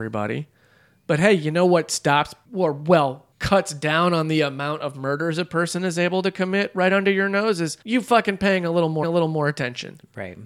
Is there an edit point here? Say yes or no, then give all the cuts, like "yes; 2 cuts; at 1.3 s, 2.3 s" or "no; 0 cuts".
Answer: yes; 2 cuts; at 7.8 s, 9.0 s